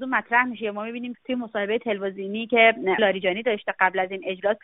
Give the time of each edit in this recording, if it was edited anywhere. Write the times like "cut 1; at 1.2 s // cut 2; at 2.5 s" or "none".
cut 1; at 1.1 s // cut 2; at 3.0 s